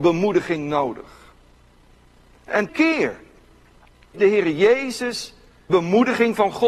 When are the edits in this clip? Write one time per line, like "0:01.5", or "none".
0:02.7
0:04.1
0:05.7